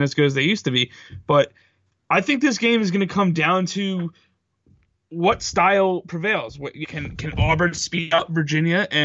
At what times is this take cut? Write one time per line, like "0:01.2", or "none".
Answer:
0:06.8